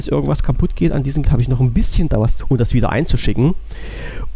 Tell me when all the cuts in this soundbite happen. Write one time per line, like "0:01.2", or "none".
0:01.2
0:02.1
0:02.4

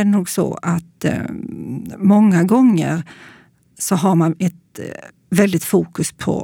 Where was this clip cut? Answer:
none

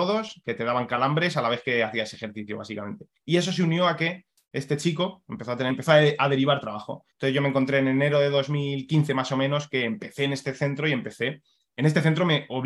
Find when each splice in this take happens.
0:03.2
0:05.7
0:07.1

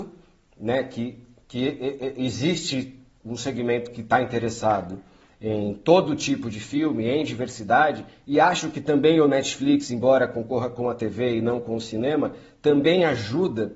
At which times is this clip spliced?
none

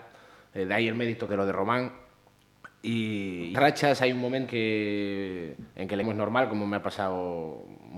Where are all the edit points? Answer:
0:01.3
0:03.5
0:04.5
0:06.0

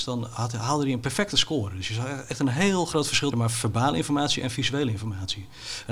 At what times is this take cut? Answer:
0:03.3

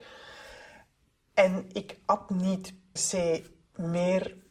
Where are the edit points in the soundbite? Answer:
0:03.0

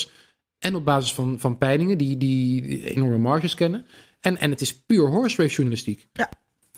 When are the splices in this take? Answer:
none

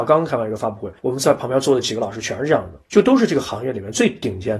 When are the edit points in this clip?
0:01.0
0:02.8

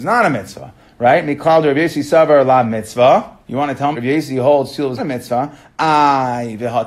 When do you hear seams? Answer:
0:03.4
0:03.9
0:05.0

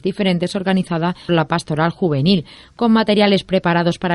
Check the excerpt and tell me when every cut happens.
0:01.3

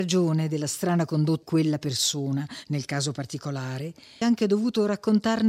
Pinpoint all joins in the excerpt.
0:01.4
0:04.2

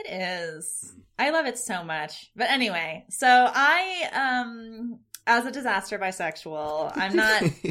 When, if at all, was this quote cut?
0:05.2

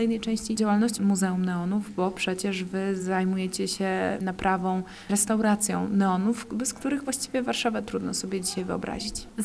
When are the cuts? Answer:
none

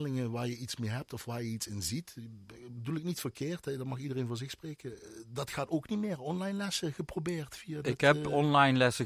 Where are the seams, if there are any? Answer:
none

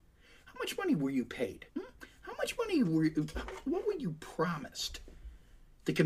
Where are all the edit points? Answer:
0:01.7

